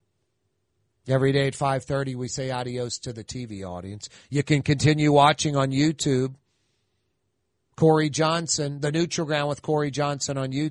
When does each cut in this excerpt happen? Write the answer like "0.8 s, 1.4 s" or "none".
none